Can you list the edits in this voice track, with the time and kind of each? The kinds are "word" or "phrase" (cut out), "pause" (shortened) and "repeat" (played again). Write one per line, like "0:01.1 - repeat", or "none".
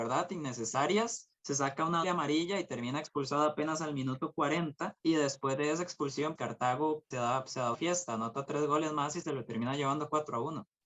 0:01.4 - pause
0:02.0 - word
0:05.0 - pause
0:06.4 - word
0:07.1 - word
0:07.7 - word